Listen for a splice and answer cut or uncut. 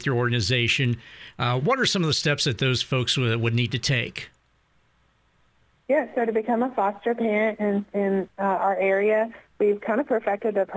uncut